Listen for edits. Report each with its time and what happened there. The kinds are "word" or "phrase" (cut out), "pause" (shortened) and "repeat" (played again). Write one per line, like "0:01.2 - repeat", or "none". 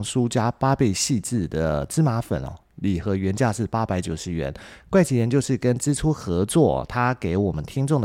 none